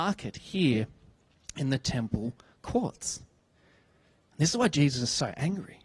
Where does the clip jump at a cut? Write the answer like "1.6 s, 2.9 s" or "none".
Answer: none